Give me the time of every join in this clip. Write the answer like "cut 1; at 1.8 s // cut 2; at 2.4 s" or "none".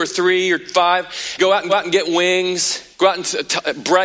cut 1; at 1.4 s // cut 2; at 1.7 s // cut 3; at 2.9 s